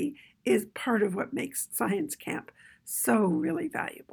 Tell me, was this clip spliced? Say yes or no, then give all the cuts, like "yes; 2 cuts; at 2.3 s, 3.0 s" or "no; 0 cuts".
no; 0 cuts